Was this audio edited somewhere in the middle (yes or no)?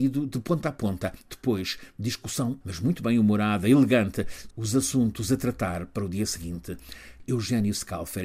yes